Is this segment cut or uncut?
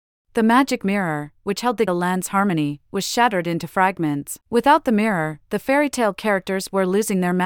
cut